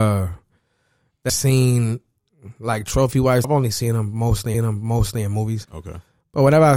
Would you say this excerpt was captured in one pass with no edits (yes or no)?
no